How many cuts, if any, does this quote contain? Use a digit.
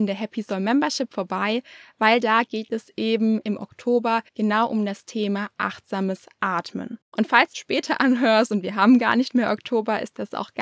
4